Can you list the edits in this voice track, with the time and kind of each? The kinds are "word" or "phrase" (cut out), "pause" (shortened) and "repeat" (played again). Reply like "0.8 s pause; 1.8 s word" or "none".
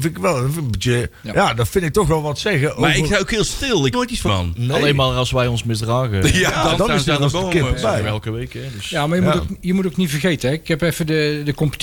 1.2 s pause; 3.9 s word; 4.3 s word; 6.8 s word